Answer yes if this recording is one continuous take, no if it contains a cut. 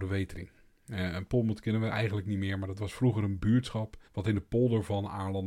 no